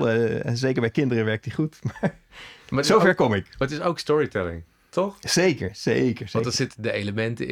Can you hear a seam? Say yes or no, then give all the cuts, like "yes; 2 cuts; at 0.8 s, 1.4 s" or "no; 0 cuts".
no; 0 cuts